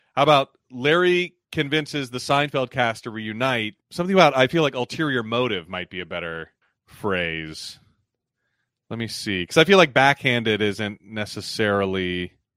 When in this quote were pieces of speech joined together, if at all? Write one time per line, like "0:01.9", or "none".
0:03.8
0:06.6